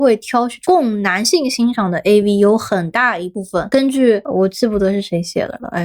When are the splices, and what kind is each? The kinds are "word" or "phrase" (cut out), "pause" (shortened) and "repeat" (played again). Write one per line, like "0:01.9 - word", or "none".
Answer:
none